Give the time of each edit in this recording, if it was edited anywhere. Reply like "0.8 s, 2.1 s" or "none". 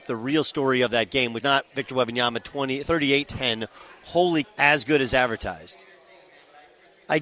1.4 s, 3.3 s, 4.4 s